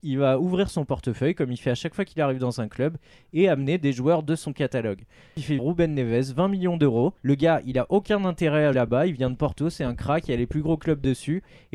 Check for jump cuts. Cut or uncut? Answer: cut